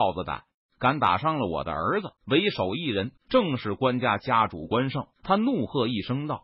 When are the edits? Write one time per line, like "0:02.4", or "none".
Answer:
0:02.2
0:03.2
0:05.1